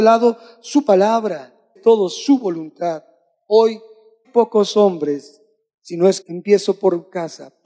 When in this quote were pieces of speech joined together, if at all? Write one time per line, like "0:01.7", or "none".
0:01.8
0:04.2
0:06.2